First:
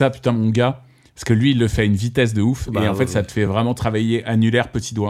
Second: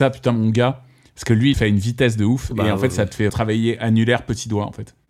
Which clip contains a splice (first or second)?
second